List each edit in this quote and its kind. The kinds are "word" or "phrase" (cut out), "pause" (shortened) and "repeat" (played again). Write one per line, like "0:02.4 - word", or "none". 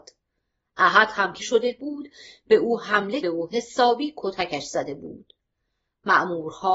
0:01.4 - word
0:03.2 - word